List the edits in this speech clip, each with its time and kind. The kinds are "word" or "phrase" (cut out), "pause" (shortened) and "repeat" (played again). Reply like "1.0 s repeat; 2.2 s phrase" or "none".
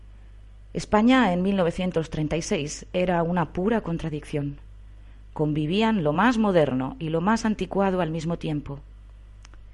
none